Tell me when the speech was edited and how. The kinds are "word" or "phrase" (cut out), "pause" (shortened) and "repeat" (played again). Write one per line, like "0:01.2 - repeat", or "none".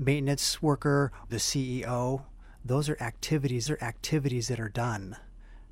0:01.3 - phrase
0:03.7 - repeat